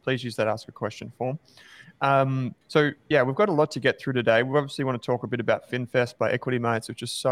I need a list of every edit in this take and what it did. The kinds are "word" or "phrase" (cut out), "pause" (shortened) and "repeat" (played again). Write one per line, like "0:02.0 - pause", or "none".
0:02.6 - pause